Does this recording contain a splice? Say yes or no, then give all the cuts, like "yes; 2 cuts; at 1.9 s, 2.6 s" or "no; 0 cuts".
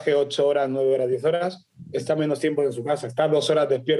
no; 0 cuts